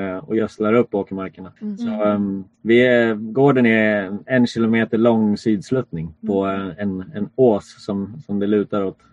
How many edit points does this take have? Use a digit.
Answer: 3